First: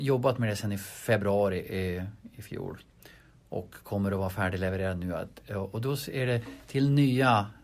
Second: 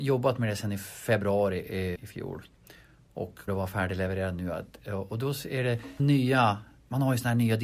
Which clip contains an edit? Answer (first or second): second